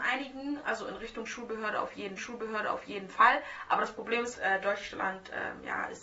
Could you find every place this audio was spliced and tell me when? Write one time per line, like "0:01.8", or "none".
0:02.2
0:04.3

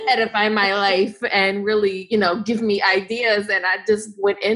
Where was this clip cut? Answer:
none

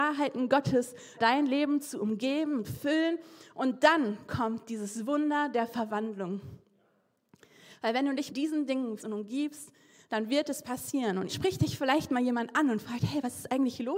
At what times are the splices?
0:01.2
0:02.6
0:08.3
0:09.0
0:11.3

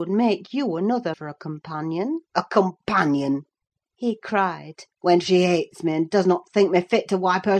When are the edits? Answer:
0:01.1
0:02.3
0:04.9

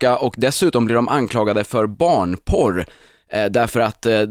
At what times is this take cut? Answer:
none

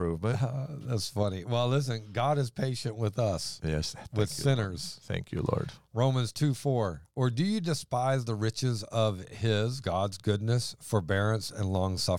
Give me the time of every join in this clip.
0:05.8
0:07.1

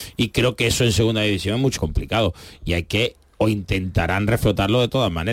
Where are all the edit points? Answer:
0:01.8

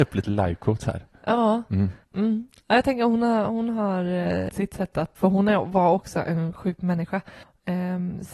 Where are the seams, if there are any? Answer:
0:02.0
0:04.5
0:05.1
0:06.8

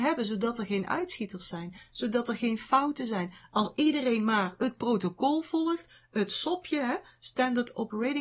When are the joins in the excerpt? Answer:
none

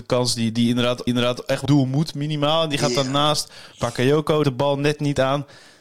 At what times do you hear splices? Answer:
0:01.1
0:01.7
0:04.4

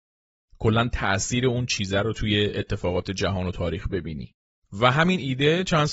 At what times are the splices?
none

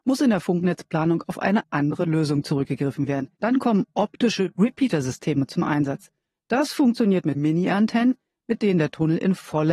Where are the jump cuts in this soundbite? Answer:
0:03.4
0:07.3

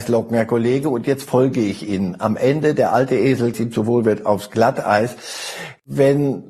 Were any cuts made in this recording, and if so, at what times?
0:03.5

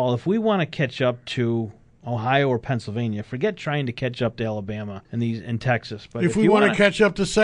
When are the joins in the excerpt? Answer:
0:05.0

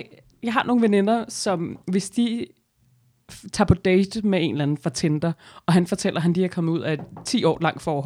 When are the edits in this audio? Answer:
0:01.8

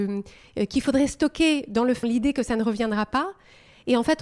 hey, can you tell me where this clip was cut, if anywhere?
0:02.0

